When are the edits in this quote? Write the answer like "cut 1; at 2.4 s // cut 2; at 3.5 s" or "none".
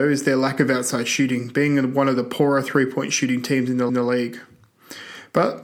cut 1; at 3.9 s